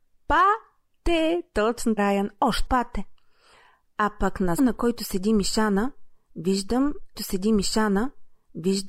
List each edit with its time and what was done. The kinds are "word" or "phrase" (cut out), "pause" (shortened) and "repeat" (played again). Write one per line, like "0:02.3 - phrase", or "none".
0:02.0 - word
0:02.7 - word
0:04.6 - word
0:07.2 - repeat